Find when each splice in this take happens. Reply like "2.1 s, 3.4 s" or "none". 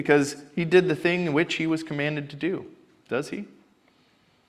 none